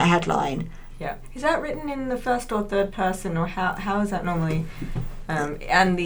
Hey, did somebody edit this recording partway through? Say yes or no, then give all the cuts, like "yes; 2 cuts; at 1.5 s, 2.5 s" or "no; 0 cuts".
no; 0 cuts